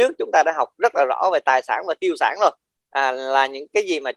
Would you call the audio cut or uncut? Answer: uncut